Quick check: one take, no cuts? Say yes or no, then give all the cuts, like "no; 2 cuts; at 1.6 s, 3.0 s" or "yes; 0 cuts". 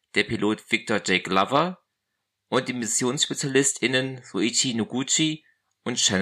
yes; 0 cuts